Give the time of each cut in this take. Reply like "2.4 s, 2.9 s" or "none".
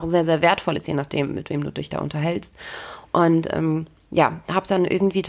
none